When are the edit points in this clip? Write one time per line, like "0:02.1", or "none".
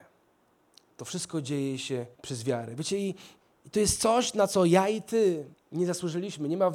0:02.1
0:03.4
0:05.5